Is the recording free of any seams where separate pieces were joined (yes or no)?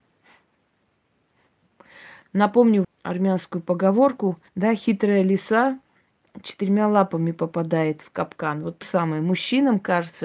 no